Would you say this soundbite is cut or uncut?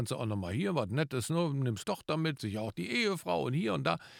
cut